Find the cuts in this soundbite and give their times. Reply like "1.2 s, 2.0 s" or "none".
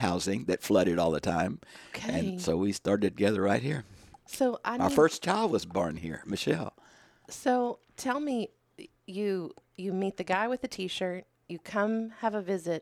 none